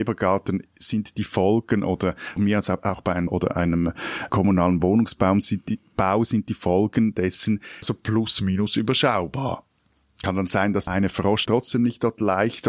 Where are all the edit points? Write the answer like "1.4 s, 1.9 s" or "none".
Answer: 2.4 s, 3.3 s, 4.3 s, 7.8 s, 10.9 s, 11.5 s